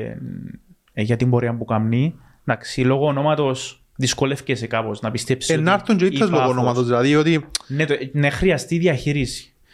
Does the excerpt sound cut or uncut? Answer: uncut